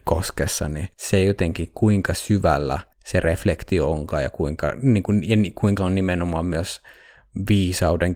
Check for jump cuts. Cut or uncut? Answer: cut